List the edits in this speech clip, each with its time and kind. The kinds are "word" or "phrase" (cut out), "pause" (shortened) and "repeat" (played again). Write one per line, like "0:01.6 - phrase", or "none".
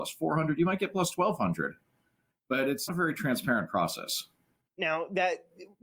0:02.9 - word

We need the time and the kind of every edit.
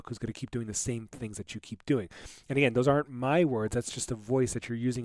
none

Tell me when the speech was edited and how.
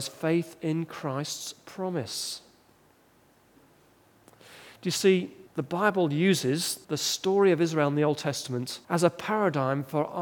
0:05.5 - pause
0:06.8 - pause
0:08.8 - pause

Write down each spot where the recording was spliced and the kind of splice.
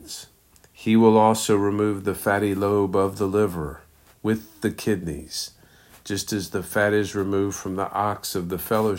none

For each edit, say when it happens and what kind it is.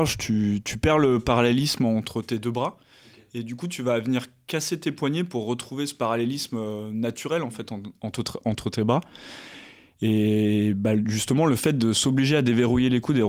none

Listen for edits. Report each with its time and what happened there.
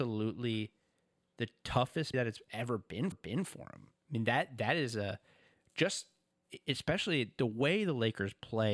0:02.1 - word
0:03.1 - repeat
0:04.0 - pause

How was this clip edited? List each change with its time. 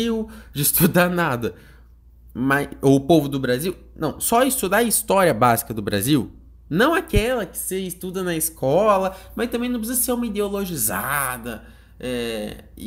none

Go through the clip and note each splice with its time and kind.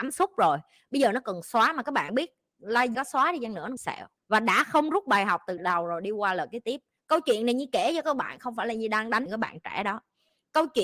0:02.9 - word
0:03.8 - phrase
0:05.6 - word
0:09.3 - phrase

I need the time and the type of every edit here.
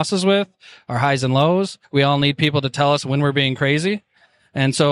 0:01.8 - pause

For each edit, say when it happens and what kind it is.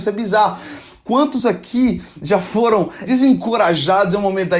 none

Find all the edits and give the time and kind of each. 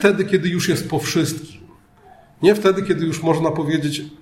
none

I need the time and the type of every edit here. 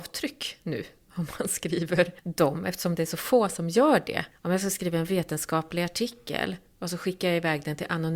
none

